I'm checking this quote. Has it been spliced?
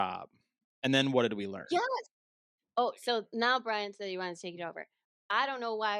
no; 0 cuts

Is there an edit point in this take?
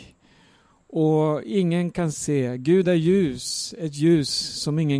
no; 0 cuts

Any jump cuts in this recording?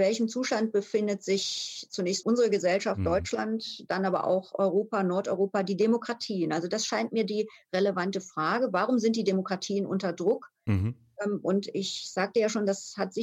yes; 1 cut; at 2.2 s

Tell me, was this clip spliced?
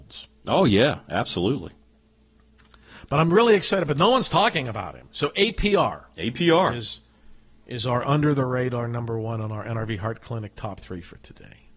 no; 0 cuts

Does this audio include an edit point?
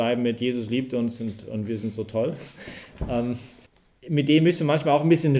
yes; 1 cut; at 3.7 s

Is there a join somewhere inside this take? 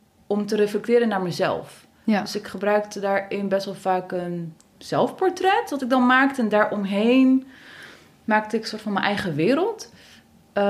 no; 0 cuts

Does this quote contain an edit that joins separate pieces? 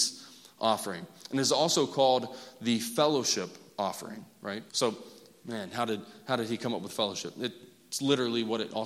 yes; 1 cut; at 4.7 s

